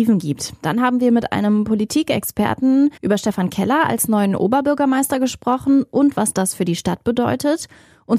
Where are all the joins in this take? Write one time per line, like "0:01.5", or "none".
0:03.0